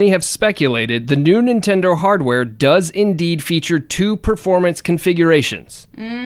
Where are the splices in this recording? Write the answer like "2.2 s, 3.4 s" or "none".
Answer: none